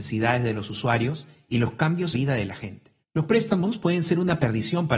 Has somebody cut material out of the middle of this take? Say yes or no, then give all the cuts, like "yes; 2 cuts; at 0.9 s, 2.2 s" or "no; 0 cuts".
yes; 2 cuts; at 2.1 s, 3.0 s